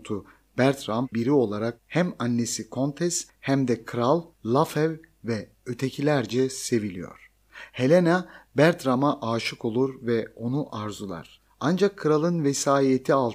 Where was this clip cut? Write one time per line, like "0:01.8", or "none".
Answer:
0:01.1
0:04.3